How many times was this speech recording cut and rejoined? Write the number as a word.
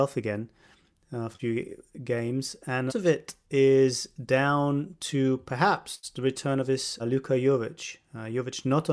three